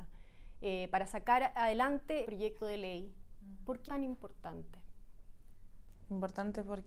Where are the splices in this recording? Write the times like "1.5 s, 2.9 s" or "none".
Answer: 2.2 s, 3.9 s